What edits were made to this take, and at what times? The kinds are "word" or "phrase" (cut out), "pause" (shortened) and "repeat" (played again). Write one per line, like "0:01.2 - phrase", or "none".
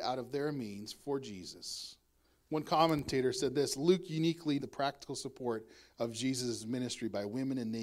0:04.6 - word